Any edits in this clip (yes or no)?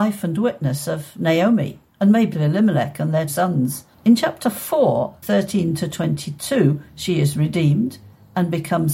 yes